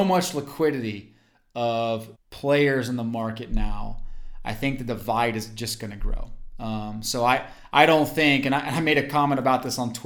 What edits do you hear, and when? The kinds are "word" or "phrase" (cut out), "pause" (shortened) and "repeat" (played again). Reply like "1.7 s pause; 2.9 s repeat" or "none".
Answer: 2.1 s pause

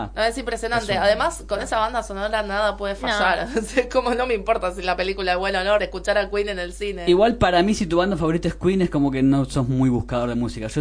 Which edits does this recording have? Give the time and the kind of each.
5.8 s word

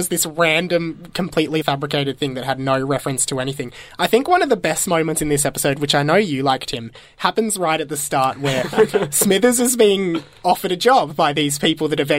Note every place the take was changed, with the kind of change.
1.6 s word

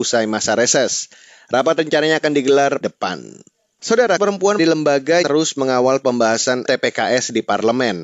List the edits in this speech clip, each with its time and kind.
1.8 s word; 2.8 s word; 4.2 s word; 4.6 s word; 5.2 s word; 6.7 s word

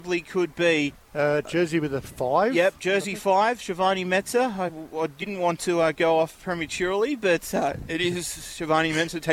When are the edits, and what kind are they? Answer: none

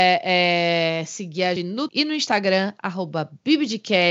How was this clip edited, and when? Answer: 1.6 s word; 1.9 s word

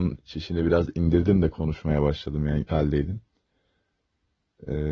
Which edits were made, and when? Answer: 2.7 s word

